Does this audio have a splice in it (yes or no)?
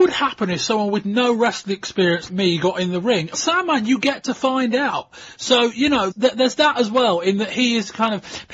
yes